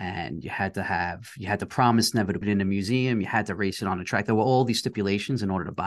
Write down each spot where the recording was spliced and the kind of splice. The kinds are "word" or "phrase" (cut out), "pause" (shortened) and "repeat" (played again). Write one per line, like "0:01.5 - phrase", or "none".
0:02.4 - word